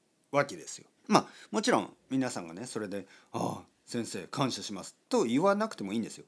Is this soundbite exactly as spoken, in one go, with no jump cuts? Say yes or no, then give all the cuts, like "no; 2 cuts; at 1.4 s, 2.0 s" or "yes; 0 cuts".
no; 1 cut; at 1.0 s